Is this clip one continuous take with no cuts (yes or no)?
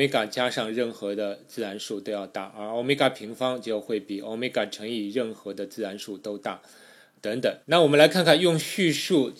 no